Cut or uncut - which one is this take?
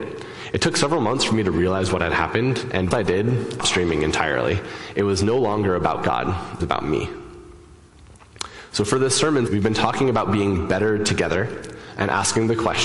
cut